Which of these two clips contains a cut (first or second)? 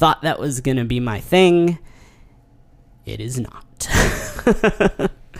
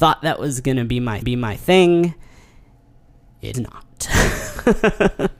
second